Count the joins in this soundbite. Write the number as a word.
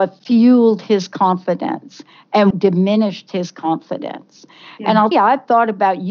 two